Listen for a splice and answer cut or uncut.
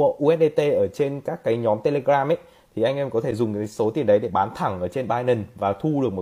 uncut